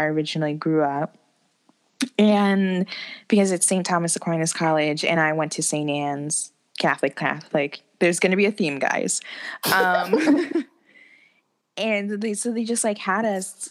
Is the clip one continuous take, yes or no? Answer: yes